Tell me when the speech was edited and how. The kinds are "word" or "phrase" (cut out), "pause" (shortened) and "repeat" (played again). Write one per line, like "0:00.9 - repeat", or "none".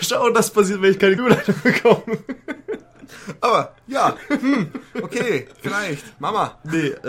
0:01.2 - word